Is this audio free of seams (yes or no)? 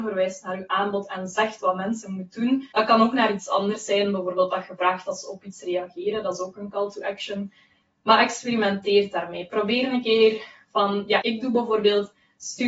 no